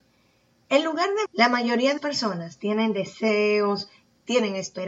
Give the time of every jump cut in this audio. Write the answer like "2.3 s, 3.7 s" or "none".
1.3 s, 2.0 s